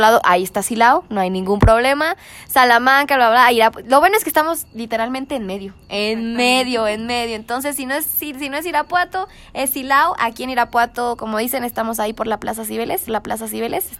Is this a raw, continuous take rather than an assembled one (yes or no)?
no